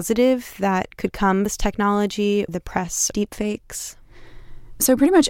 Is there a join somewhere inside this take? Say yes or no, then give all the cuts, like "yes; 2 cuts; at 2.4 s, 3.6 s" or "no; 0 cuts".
yes; 3 cuts; at 1.5 s, 2.5 s, 3.1 s